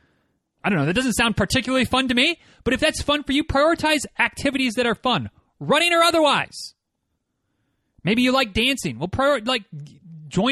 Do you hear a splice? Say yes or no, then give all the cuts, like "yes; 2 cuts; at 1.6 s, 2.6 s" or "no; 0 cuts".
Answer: no; 0 cuts